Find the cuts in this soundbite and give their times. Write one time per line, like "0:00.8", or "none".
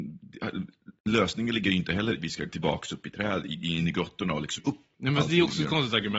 0:01.0
0:02.2
0:02.5
0:04.6
0:04.9